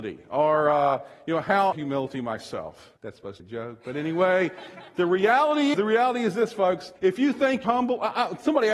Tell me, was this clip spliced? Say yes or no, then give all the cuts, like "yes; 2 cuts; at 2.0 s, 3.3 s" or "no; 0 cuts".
yes; 6 cuts; at 1.7 s, 3.0 s, 3.4 s, 5.7 s, 7.0 s, 7.6 s